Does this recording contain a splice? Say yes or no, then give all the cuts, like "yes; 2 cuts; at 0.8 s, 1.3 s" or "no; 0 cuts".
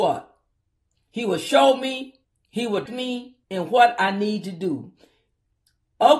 yes; 3 cuts; at 2.2 s, 2.9 s, 3.4 s